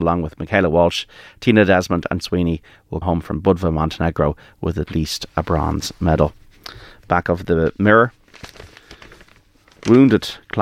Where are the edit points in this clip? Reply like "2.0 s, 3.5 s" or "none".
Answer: 2.2 s, 3.0 s